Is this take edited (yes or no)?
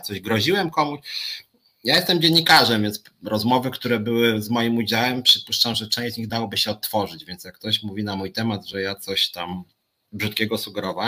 no